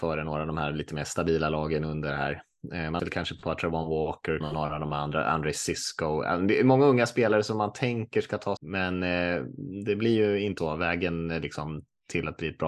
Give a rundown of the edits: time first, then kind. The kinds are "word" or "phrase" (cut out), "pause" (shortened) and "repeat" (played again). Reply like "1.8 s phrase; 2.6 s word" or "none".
3.0 s word; 4.4 s phrase; 8.6 s word; 10.6 s word